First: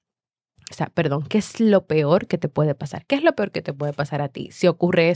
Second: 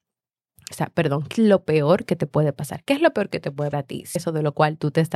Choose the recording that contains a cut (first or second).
second